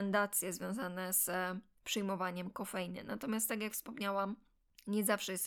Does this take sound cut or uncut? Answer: uncut